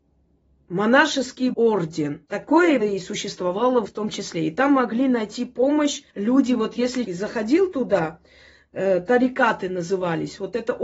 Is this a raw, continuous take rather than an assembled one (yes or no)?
no